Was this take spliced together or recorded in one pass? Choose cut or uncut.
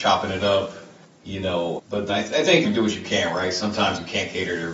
cut